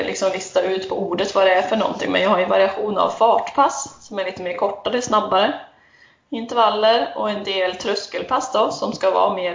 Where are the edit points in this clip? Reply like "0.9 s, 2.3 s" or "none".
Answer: none

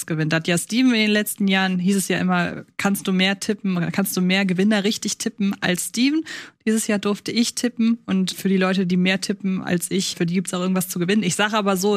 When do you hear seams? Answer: 8.3 s, 10.1 s

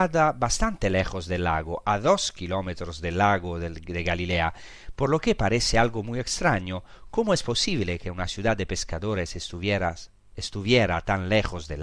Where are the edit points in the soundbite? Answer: none

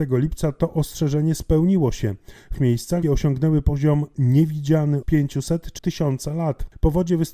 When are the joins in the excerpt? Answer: 2.5 s, 3.0 s, 5.0 s, 5.8 s

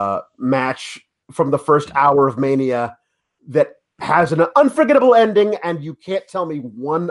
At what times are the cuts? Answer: none

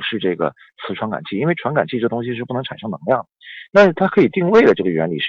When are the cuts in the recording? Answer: none

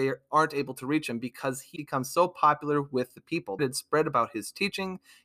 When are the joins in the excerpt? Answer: 1.8 s, 3.6 s

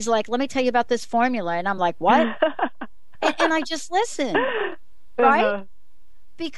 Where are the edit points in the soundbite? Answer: none

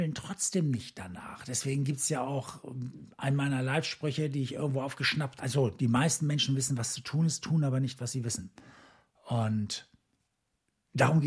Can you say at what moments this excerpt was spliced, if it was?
5.4 s

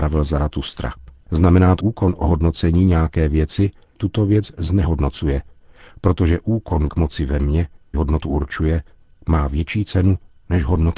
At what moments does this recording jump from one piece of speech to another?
1.2 s, 1.8 s, 4.0 s, 6.9 s, 7.9 s

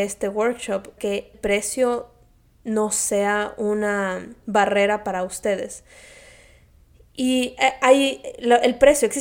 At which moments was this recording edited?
1.0 s, 1.3 s

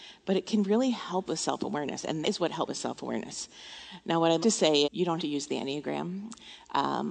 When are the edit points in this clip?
1.3 s, 2.2 s, 2.7 s, 4.4 s, 4.8 s, 5.2 s

